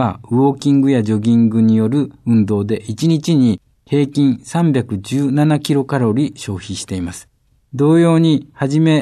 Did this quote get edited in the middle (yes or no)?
no